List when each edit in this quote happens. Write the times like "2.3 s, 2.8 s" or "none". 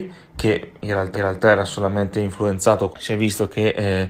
1.1 s, 2.9 s